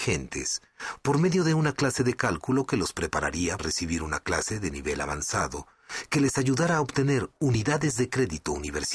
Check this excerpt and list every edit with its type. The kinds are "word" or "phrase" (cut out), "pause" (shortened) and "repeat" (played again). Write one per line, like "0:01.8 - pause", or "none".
0:03.6 - word